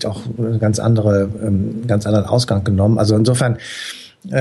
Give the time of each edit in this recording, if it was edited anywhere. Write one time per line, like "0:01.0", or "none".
none